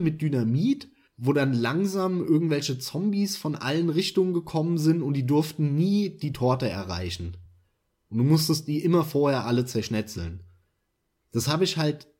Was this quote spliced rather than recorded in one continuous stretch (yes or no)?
no